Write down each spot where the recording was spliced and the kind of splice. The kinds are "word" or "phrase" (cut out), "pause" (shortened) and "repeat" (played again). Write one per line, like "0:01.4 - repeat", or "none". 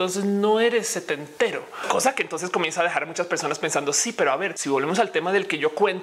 none

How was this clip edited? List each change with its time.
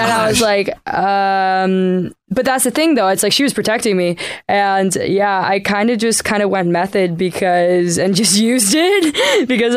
0:02.2 - pause

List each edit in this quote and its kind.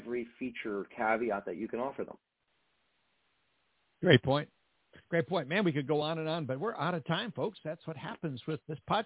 none

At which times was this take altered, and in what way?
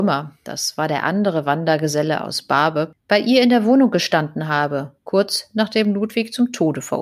none

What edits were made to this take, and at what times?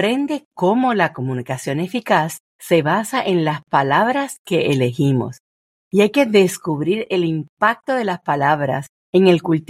0:02.5 - pause

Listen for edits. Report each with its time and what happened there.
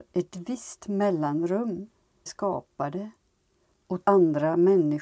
0:02.3 - phrase
0:04.0 - word

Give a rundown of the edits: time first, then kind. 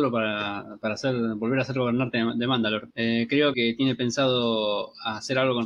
0:02.9 - pause
0:03.5 - word

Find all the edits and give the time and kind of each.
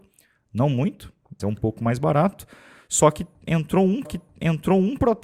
0:01.4 - word
0:04.0 - repeat

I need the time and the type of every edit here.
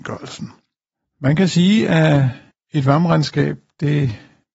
none

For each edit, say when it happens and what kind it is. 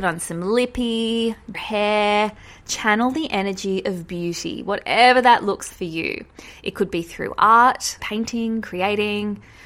0:01.5 - word
0:05.7 - word
0:08.0 - word
0:08.6 - word

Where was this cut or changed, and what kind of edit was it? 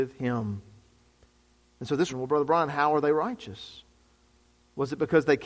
0:02.1 - phrase

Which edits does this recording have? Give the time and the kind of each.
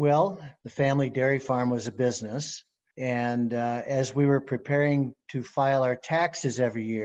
none

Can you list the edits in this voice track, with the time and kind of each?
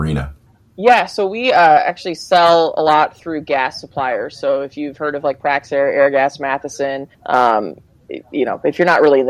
0:07.1 - pause

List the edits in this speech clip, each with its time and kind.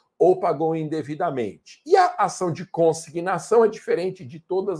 none

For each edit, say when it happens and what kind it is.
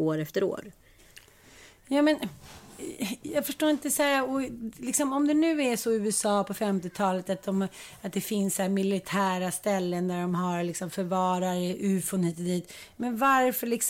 none

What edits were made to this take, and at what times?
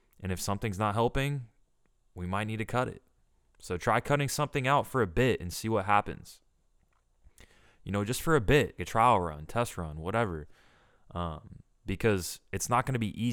0:08.8 - word

